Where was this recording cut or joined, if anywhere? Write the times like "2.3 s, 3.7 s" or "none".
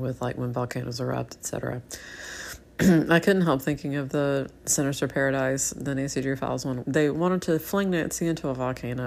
6.8 s

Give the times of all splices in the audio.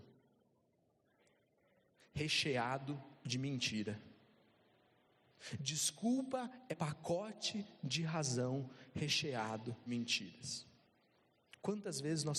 6.7 s, 9.9 s

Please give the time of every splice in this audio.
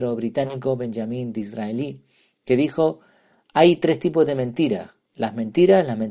none

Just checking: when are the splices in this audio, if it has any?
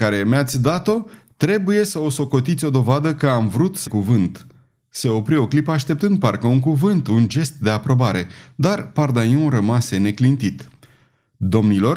3.9 s

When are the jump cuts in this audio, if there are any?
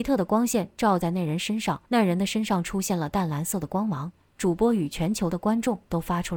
1.8 s

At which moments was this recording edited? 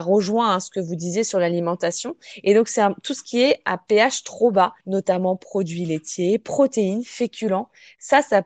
4.8 s

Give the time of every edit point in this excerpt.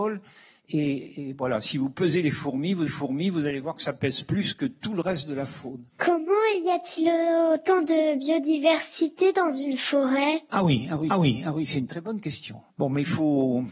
2.9 s, 11.1 s, 12.7 s

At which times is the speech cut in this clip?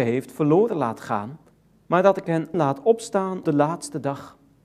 1.5 s, 2.5 s, 3.4 s

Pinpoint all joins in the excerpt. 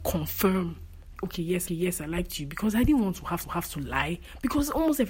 1.2 s, 1.7 s, 3.4 s

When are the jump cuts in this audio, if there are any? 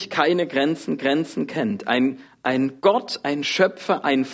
1.0 s, 2.8 s

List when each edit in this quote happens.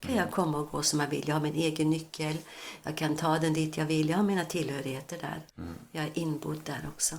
5.5 s

